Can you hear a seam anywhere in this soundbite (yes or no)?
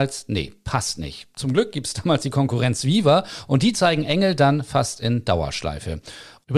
no